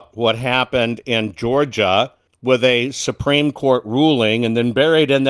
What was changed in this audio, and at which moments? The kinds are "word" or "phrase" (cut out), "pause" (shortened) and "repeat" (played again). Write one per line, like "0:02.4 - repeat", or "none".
0:02.3 - pause